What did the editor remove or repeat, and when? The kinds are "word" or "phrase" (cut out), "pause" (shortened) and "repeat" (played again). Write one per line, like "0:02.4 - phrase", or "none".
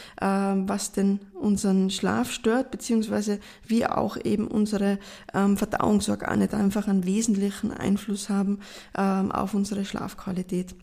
none

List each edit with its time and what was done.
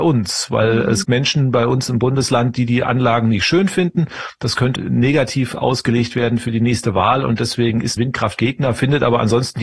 0:01.0 - word
0:04.8 - word
0:08.0 - word

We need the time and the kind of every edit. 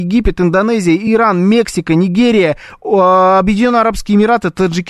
none

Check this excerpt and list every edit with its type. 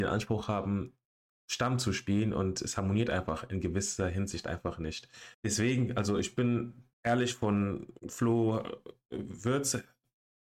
0:01.3 - pause
0:05.3 - pause
0:06.9 - pause
0:08.0 - pause

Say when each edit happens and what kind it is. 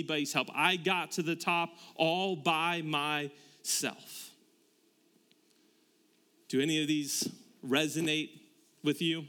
none

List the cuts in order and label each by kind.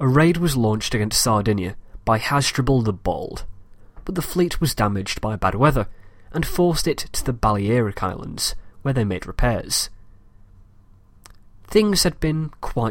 none

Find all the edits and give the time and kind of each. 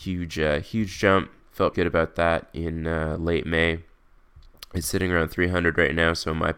0:01.7 - word

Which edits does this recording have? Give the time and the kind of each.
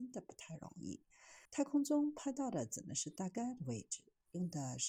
0:01.4 - pause

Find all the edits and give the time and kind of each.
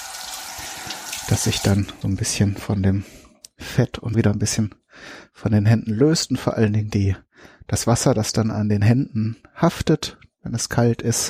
0:02.0 - word
0:04.1 - word

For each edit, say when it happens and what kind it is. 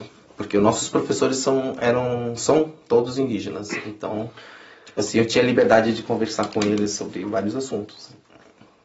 none

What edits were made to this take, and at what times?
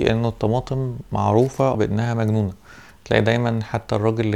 0:01.7 - word

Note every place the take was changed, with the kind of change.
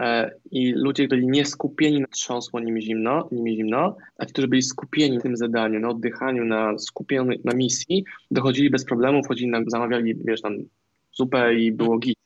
0:01.1 - word
0:02.0 - phrase
0:04.1 - pause
0:05.2 - word
0:08.2 - pause
0:09.6 - word

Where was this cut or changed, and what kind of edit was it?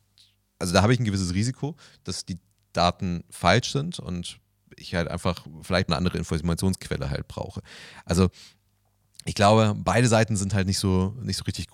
0:05.9 - phrase

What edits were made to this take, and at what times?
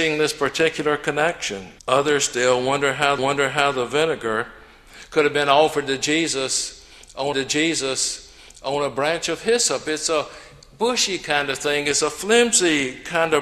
0:01.8 - pause
0:03.2 - repeat
0:07.3 - repeat

